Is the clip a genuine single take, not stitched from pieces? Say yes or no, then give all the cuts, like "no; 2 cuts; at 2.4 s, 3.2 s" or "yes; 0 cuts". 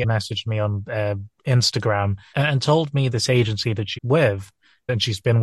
no; 3 cuts; at 2.3 s, 3.1 s, 3.9 s